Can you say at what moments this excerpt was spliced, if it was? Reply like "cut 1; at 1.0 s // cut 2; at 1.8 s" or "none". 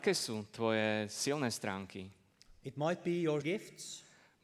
cut 1; at 3.4 s